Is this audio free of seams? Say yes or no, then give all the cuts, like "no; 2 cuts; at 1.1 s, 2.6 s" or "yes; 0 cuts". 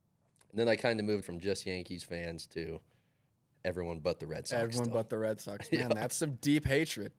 no; 1 cut; at 1.2 s